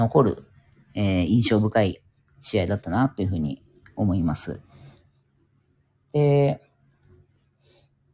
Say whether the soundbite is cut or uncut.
uncut